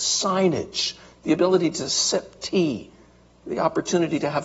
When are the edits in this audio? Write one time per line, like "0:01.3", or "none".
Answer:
none